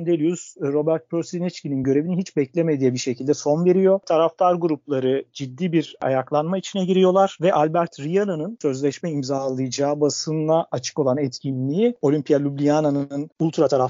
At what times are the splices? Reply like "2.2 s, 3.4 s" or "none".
none